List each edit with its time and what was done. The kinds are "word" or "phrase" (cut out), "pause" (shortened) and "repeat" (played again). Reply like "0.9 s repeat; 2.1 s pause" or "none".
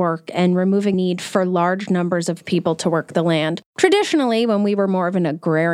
0.9 s word